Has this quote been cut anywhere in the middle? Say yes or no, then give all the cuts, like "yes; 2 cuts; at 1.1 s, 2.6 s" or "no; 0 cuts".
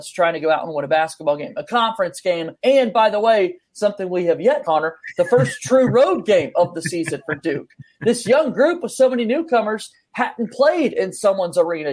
yes; 2 cuts; at 2.6 s, 4.6 s